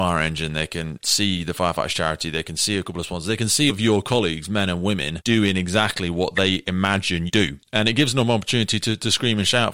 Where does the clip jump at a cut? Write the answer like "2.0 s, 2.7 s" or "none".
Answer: 3.7 s, 7.3 s